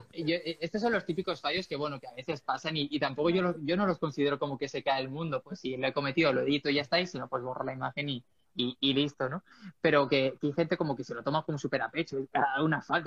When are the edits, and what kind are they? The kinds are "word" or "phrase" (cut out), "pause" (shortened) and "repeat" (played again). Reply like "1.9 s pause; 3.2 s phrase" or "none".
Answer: none